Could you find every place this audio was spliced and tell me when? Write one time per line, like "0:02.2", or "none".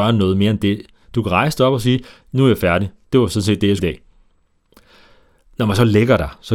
0:03.8